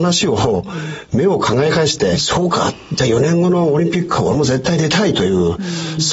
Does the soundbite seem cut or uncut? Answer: cut